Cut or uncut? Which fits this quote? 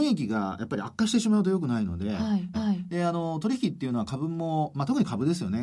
cut